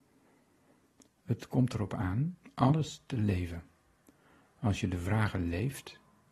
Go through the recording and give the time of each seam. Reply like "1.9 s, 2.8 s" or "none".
none